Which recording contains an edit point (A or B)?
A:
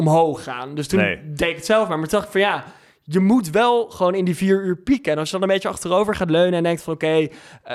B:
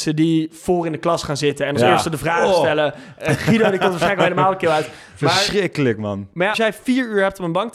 B